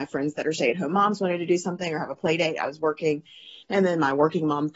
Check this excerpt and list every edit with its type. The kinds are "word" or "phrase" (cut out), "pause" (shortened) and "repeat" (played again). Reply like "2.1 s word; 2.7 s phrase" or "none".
3.6 s pause